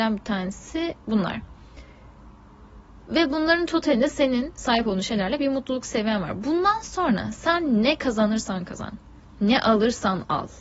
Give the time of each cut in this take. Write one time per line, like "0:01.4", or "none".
none

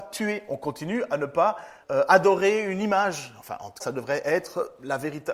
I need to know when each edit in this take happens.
0:01.8
0:03.8

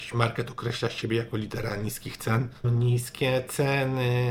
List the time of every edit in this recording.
0:02.6

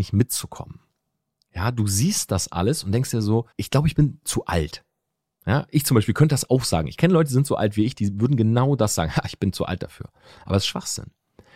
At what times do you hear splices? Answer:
0:03.5

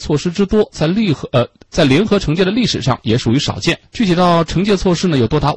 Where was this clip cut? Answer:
0:03.9

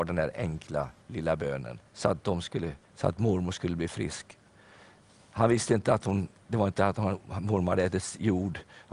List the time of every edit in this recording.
0:01.9
0:02.8

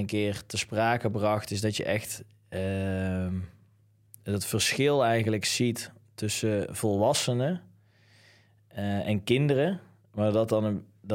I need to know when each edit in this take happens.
none

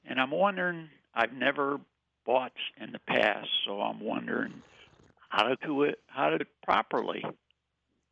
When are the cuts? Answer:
0:02.7
0:05.6
0:06.4

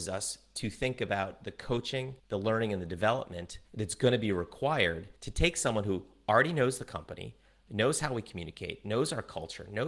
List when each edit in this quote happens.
0:02.2
0:03.7
0:05.2

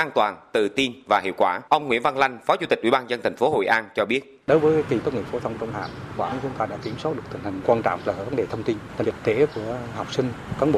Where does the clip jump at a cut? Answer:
0:01.7
0:04.4
0:05.0
0:06.2
0:07.6
0:08.0
0:09.0

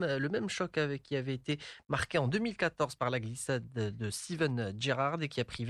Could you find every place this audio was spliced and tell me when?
none

